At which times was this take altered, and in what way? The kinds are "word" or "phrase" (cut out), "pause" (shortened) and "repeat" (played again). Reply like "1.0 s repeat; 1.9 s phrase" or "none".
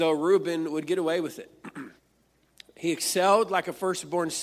2.0 s pause